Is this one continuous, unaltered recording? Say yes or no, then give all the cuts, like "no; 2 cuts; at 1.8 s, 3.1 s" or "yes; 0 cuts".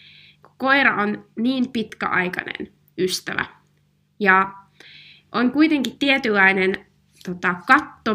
no; 1 cut; at 1.3 s